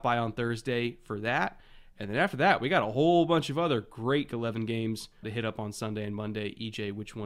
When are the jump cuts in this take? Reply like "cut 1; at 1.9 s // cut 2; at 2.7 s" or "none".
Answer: cut 1; at 4.3 s // cut 2; at 5.2 s

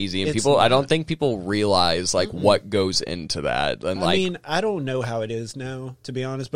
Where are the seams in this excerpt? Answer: none

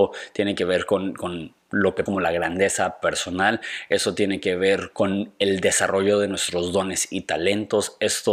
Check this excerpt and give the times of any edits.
cut 1; at 2.1 s // cut 2; at 4.9 s

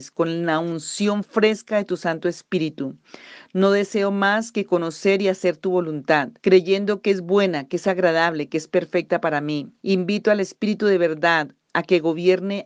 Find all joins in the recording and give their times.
cut 1; at 6.4 s // cut 2; at 9.8 s

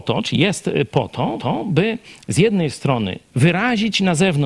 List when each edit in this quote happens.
cut 1; at 1.4 s // cut 2; at 3.3 s

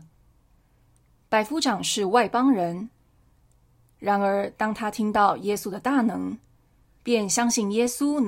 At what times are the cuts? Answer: none

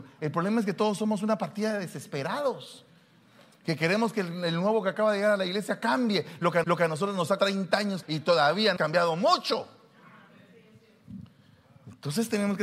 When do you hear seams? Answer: cut 1; at 6.6 s // cut 2; at 7.4 s // cut 3; at 8.0 s // cut 4; at 8.8 s

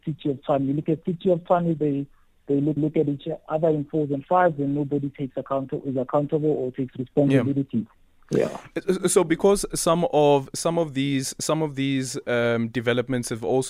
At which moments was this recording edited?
cut 1; at 2.8 s

